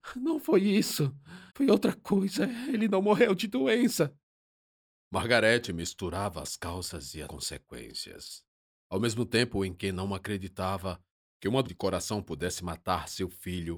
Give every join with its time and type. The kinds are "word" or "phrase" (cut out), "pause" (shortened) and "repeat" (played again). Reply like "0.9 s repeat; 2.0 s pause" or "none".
1.5 s pause; 7.3 s word; 11.6 s word